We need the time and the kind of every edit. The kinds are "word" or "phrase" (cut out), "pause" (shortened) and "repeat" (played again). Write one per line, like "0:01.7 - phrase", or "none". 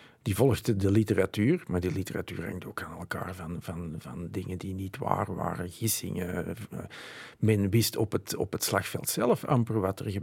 none